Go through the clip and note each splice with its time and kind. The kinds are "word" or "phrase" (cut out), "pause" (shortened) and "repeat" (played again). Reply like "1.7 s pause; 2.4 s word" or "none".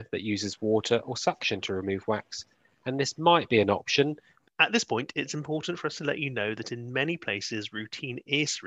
none